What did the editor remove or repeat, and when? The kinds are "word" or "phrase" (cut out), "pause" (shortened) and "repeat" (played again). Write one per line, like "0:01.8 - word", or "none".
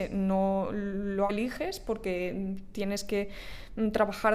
0:01.3 - phrase